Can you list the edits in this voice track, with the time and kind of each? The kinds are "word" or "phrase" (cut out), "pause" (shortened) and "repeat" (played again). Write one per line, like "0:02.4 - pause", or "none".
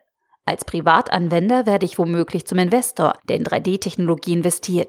0:03.2 - pause